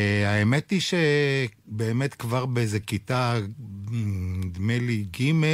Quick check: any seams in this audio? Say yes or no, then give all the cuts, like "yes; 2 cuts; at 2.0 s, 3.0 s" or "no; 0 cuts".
no; 0 cuts